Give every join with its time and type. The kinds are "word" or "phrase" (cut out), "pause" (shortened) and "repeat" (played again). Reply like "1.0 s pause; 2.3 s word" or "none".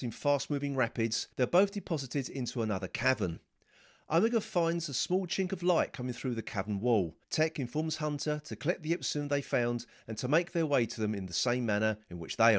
1.3 s pause; 7.2 s pause